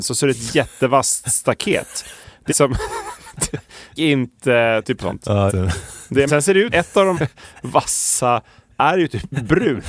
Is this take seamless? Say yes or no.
no